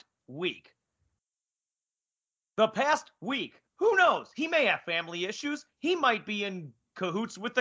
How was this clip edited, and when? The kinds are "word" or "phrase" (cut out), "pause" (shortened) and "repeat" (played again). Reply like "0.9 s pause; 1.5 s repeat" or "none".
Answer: 3.7 s pause